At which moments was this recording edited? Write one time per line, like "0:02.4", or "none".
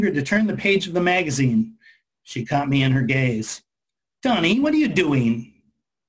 none